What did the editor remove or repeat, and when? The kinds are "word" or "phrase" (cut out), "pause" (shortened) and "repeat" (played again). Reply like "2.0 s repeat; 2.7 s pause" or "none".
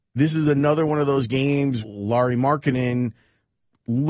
1.8 s word